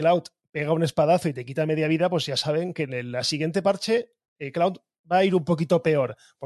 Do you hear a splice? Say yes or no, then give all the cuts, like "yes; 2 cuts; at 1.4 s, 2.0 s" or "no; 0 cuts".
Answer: no; 0 cuts